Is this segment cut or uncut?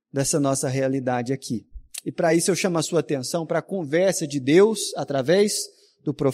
uncut